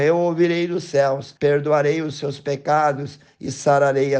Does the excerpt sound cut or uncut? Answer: cut